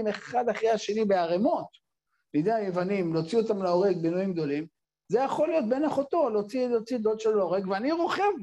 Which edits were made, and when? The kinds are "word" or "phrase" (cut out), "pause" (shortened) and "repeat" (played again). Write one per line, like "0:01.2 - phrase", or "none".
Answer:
none